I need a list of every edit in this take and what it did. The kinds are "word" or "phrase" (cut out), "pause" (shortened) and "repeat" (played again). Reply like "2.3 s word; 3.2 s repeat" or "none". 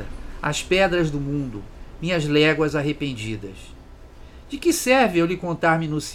none